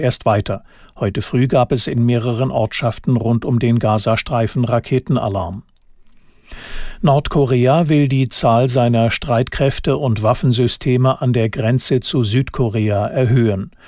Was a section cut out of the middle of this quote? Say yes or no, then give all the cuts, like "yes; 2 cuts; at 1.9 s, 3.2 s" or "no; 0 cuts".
no; 0 cuts